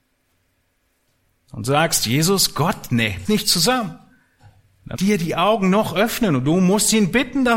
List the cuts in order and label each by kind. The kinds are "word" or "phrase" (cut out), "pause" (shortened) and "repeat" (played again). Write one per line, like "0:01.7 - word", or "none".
0:03.2 - word
0:04.9 - phrase